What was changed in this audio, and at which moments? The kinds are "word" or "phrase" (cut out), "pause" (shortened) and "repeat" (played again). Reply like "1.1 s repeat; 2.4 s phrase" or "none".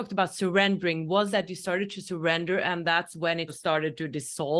1.3 s word; 3.5 s word